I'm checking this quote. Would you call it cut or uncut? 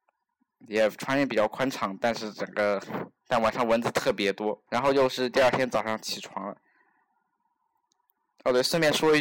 cut